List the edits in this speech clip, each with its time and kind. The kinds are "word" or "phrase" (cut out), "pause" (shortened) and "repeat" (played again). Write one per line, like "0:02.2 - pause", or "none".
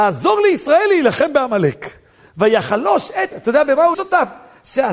0:03.3 - word
0:03.9 - word